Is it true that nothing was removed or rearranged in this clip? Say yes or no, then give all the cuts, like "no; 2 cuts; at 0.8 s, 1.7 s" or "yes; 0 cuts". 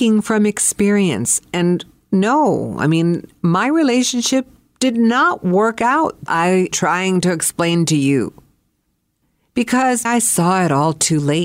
no; 3 cuts; at 6.3 s, 6.7 s, 10.0 s